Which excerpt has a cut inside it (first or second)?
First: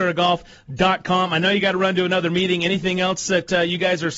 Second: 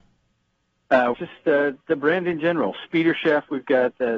second